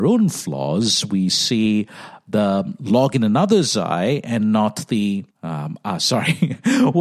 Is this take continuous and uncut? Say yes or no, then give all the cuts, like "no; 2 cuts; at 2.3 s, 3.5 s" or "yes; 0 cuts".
no; 1 cut; at 5.3 s